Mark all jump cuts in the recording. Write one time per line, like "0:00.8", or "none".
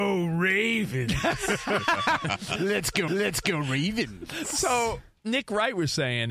0:03.1